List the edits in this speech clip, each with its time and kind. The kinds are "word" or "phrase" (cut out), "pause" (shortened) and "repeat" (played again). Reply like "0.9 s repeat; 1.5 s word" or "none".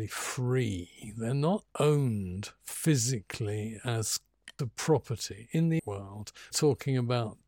1.7 s word; 4.6 s word; 5.8 s word; 6.5 s word